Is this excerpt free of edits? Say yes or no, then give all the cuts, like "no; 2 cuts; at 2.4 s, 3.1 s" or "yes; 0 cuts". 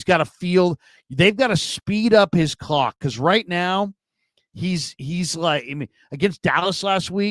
yes; 0 cuts